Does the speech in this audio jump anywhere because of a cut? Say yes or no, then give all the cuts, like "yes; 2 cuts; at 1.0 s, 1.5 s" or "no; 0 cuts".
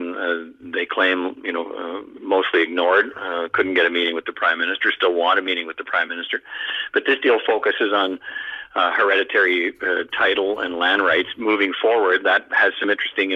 no; 0 cuts